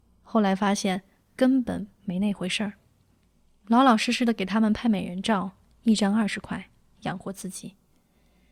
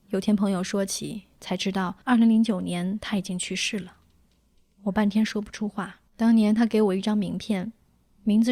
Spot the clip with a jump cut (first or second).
second